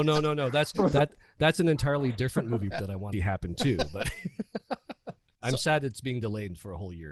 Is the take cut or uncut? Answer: cut